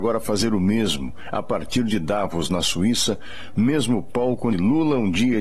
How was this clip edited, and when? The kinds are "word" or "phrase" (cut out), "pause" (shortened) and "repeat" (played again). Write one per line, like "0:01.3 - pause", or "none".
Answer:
none